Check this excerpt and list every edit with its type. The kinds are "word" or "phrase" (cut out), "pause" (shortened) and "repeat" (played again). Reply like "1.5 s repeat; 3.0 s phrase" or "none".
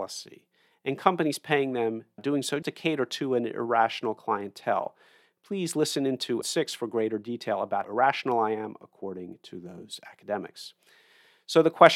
2.2 s word; 2.6 s word; 6.4 s word; 7.8 s word